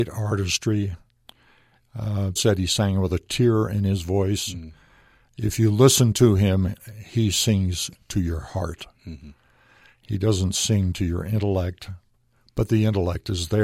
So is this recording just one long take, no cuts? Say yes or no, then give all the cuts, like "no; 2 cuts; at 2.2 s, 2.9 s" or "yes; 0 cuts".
no; 1 cut; at 2.4 s